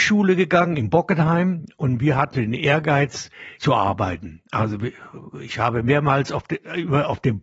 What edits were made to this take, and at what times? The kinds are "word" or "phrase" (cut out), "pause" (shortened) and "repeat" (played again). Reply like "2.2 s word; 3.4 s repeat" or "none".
2.3 s word; 3.6 s phrase